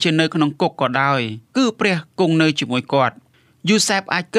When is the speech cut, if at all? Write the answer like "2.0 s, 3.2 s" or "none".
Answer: 1.5 s